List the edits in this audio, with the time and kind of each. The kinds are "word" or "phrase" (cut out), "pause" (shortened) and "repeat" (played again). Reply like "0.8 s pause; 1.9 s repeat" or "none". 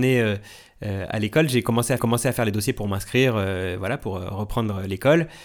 2.0 s repeat